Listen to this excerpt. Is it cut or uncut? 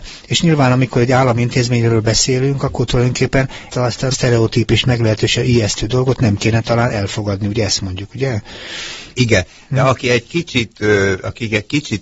cut